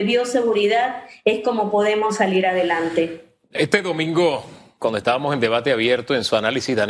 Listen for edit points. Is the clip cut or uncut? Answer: uncut